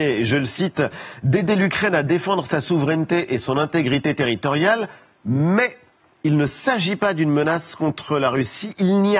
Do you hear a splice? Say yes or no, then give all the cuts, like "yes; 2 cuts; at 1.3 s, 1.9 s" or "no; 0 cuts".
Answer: no; 0 cuts